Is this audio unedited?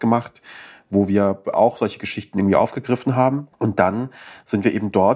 no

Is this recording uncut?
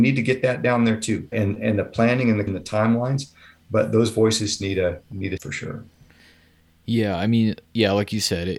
no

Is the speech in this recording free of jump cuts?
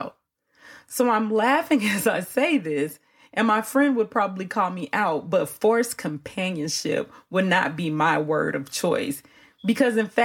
yes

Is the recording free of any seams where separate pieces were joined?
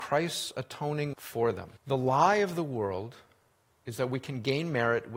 no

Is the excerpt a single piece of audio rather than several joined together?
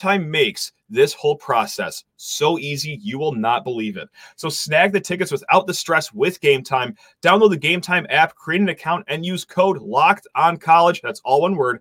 yes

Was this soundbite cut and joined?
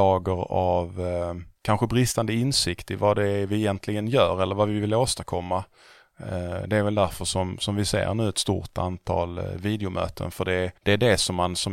yes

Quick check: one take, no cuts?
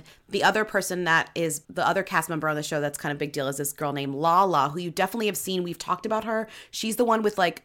no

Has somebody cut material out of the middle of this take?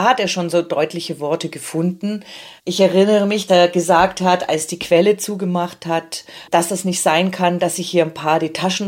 yes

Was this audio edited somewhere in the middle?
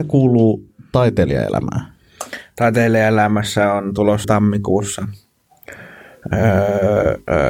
yes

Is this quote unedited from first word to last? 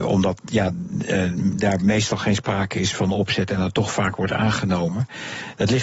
yes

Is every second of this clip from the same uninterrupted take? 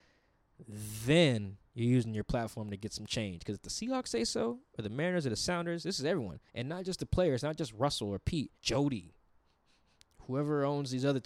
no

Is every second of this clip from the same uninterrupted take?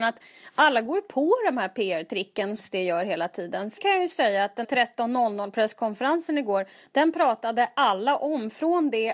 no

